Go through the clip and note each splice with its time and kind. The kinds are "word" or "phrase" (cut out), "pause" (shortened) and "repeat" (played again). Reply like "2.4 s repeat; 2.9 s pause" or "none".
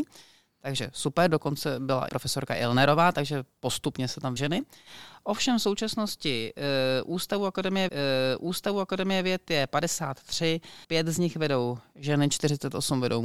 2.1 s phrase; 4.4 s phrase; 7.9 s repeat; 10.8 s pause